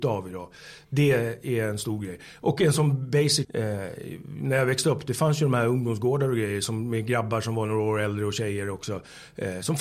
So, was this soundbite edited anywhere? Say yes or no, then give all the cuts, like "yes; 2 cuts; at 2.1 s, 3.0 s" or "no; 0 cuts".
yes; 1 cut; at 3.4 s